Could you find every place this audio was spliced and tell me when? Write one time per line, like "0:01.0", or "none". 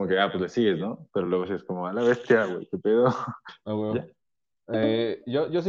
none

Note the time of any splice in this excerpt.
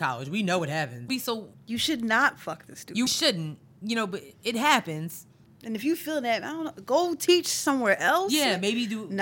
0:01.1
0:01.5
0:03.1
0:05.4

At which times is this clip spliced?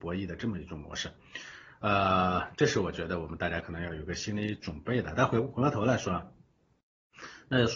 none

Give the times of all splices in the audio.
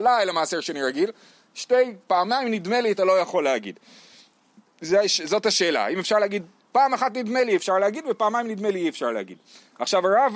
none

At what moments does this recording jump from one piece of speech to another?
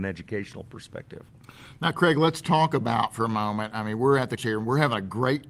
0:04.4

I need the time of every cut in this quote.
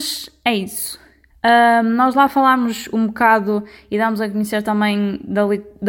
none

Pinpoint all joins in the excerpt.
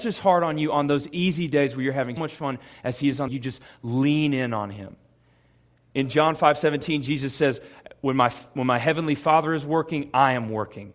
0:02.2
0:03.3

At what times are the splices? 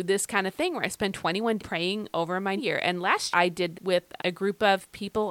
0:01.6
0:02.6
0:03.3
0:03.7
0:04.2

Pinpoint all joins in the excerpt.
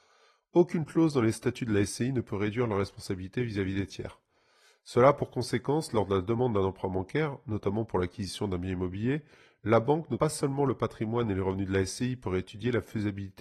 0:10.2

